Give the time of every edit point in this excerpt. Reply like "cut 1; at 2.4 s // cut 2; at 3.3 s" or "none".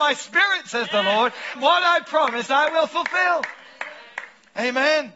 cut 1; at 1.6 s